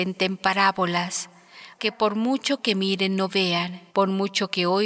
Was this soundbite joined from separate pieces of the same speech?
yes; 2 cuts; at 1.8 s, 3.9 s

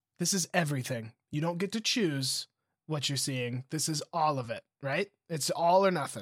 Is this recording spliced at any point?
no; 0 cuts

